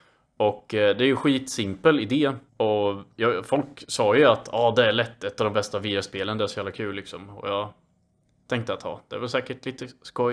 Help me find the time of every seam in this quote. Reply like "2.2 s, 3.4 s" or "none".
2.5 s